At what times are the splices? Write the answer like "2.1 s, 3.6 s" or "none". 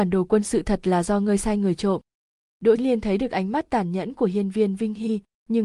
2.8 s